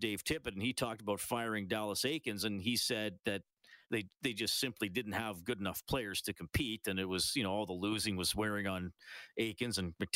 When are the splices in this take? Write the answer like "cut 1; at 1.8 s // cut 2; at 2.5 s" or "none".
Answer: cut 1; at 3.8 s